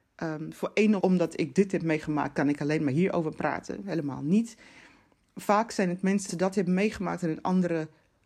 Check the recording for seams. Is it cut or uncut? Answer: cut